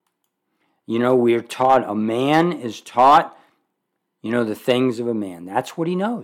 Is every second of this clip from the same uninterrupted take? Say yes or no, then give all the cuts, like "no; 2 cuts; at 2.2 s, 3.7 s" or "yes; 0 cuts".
yes; 0 cuts